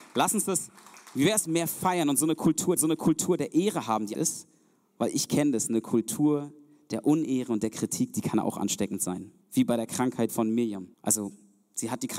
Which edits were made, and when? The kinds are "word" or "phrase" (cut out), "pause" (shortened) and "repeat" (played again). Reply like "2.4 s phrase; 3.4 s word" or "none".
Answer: 1.4 s phrase; 2.8 s repeat; 4.1 s word; 9.4 s pause; 10.3 s word; 10.9 s pause